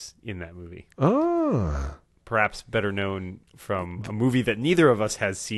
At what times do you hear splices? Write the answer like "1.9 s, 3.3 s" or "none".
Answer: 3.5 s